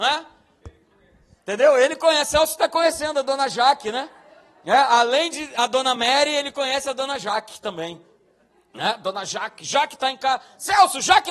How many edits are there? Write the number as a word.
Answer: zero